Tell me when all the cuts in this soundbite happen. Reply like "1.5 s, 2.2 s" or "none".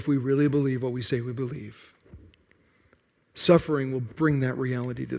none